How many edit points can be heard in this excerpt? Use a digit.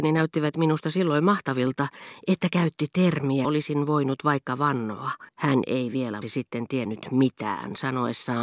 3